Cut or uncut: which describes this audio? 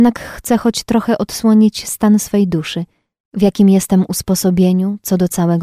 uncut